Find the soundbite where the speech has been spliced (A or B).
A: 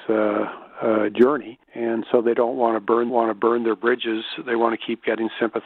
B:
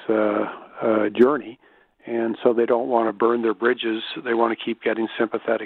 A